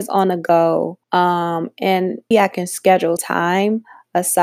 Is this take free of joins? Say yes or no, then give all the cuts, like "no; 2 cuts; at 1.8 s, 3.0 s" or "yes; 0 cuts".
no; 3 cuts; at 1.0 s, 2.3 s, 3.2 s